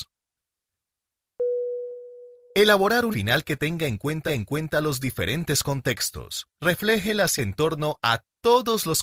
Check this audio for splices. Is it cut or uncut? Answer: cut